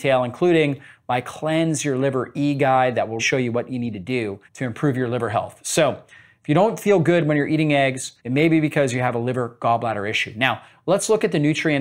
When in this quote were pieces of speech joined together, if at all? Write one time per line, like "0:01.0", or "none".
0:03.2
0:04.5
0:08.2